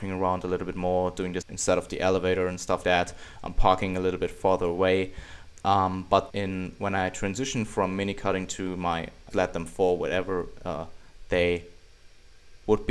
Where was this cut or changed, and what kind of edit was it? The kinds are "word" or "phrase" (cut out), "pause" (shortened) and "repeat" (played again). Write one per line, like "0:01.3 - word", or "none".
0:01.4 - word
0:02.8 - word
0:06.3 - word
0:09.3 - phrase

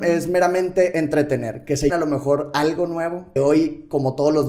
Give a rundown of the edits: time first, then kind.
0:01.9 - word
0:03.4 - word

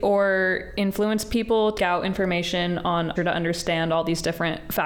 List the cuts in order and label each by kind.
0:01.8 - word
0:03.2 - word

